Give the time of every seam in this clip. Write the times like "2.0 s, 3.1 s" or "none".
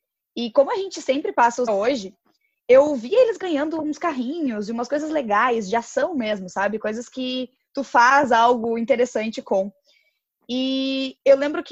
1.7 s

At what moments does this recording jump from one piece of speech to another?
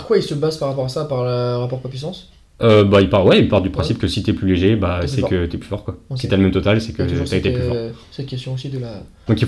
none

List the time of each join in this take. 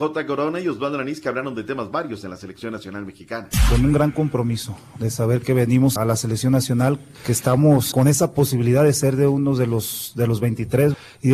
6.0 s, 7.9 s

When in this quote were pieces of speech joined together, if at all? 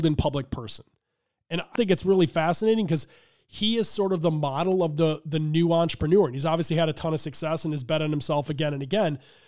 1.8 s

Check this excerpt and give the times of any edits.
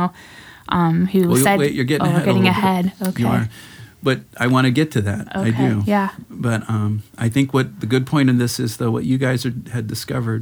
none

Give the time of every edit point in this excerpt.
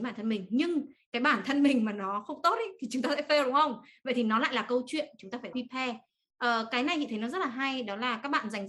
5.5 s

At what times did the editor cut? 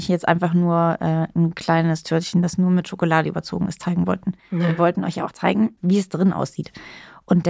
4.4 s

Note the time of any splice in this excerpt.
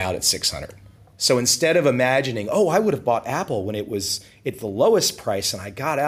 1.0 s

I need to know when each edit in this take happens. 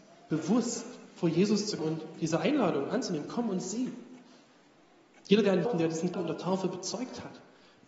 1.8 s, 5.6 s, 6.1 s

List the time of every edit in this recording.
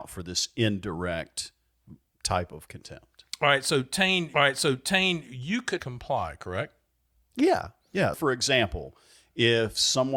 2.0 s, 4.3 s, 5.8 s, 8.1 s

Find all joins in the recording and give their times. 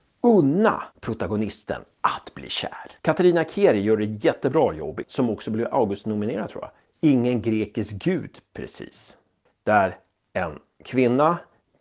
0.9 s, 3.0 s, 5.0 s, 6.8 s

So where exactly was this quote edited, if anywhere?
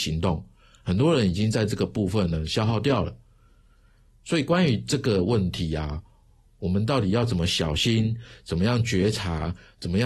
none

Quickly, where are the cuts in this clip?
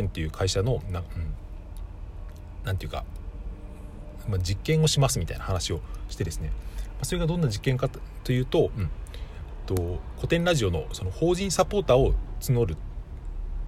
9.6 s

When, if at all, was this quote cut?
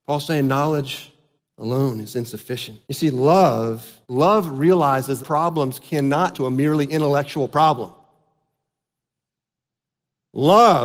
1.4 s, 2.8 s, 4.0 s, 5.2 s, 6.3 s

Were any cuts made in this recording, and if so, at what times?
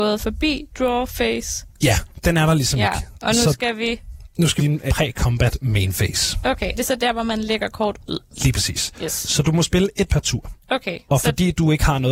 4.6 s, 4.9 s, 6.7 s, 10.1 s, 10.6 s

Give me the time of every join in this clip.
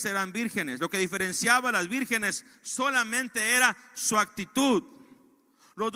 none

